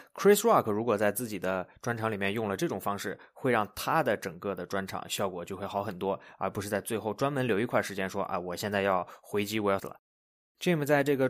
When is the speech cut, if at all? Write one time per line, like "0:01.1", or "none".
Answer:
0:09.8